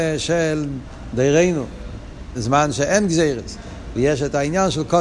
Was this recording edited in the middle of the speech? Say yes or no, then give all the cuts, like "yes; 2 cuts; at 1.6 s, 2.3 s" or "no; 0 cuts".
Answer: yes; 2 cuts; at 2.4 s, 4.0 s